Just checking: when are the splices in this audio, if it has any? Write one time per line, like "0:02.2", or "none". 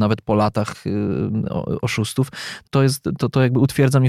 0:02.7

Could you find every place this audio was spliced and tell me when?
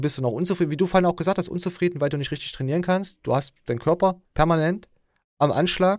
0:04.2

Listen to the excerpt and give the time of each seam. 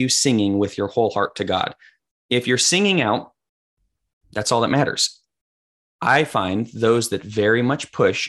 none

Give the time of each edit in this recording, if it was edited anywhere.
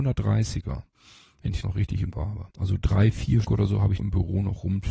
0:00.9
0:01.6
0:02.1
0:02.5
0:03.4
0:04.0

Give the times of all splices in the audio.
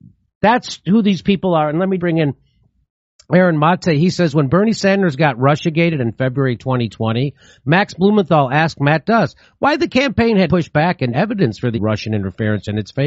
0:02.0
0:10.5
0:11.1
0:11.7

